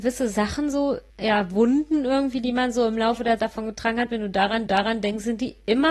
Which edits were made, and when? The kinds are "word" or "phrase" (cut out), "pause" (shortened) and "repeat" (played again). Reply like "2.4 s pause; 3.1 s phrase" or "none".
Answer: 1.1 s pause; 3.4 s word; 4.7 s repeat